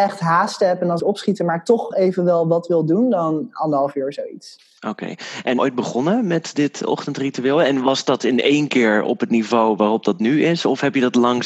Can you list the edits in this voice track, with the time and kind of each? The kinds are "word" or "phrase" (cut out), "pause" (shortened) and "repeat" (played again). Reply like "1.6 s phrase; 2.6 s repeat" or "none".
1.0 s phrase; 1.9 s word; 4.8 s pause; 5.6 s phrase